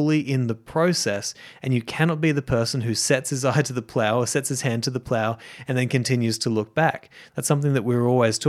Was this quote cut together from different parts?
no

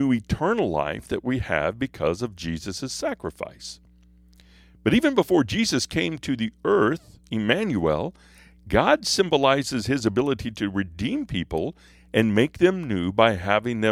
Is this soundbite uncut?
yes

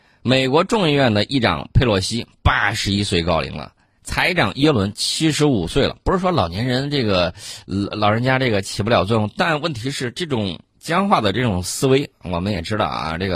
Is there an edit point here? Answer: no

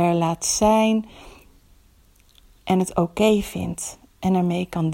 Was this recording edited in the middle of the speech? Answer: no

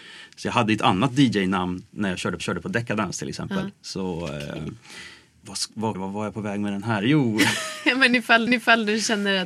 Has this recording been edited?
yes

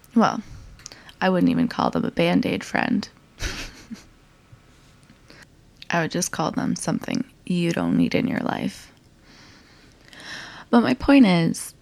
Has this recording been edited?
no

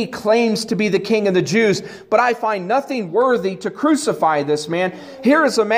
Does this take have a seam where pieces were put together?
no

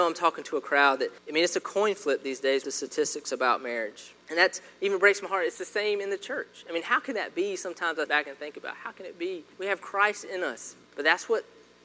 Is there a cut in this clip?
yes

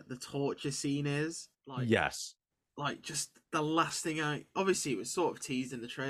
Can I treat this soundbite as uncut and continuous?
yes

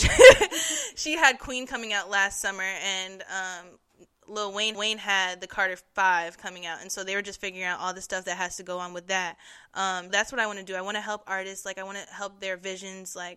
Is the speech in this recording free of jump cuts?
no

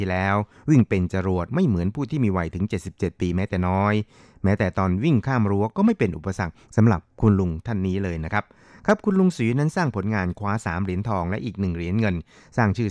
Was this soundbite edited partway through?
no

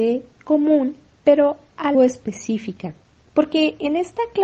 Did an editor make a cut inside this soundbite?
yes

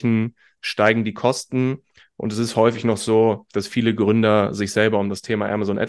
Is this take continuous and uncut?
yes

